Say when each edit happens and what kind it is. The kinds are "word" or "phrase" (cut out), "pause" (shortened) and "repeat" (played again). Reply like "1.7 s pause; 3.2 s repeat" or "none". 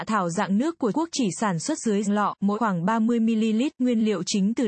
0.9 s word; 2.0 s word; 2.5 s word